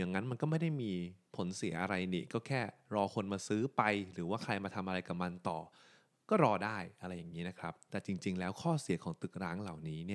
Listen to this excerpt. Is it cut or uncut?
uncut